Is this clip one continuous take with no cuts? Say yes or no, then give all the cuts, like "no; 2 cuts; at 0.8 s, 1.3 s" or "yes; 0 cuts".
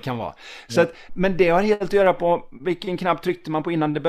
no; 1 cut; at 1.1 s